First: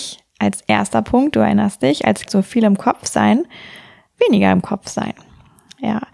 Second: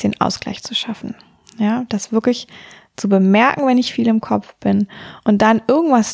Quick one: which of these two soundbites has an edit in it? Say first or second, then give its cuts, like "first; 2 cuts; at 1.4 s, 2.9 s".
first; 1 cut; at 2.3 s